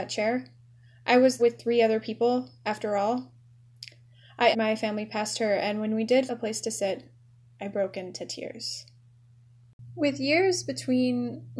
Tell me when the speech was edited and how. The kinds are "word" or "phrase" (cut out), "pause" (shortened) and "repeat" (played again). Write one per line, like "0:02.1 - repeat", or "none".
0:01.4 - word
0:04.5 - word
0:06.3 - word